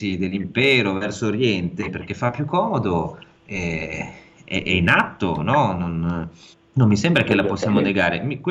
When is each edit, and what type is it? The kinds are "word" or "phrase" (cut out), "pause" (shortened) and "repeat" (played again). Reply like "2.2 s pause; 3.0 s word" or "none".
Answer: 6.5 s pause